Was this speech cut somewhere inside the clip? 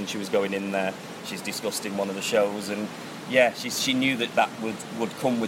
no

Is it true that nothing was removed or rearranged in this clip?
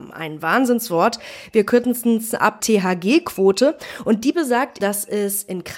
no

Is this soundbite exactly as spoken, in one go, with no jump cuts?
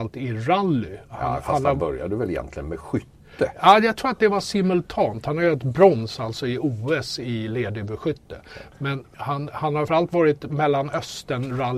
no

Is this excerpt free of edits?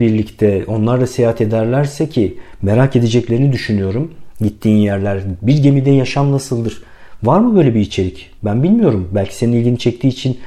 no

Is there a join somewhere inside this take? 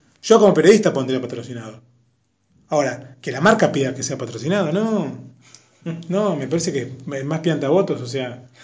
no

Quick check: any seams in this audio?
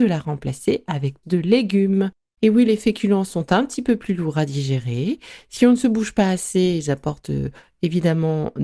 yes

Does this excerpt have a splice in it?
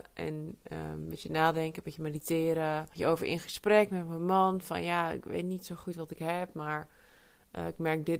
yes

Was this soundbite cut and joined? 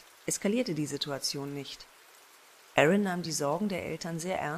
no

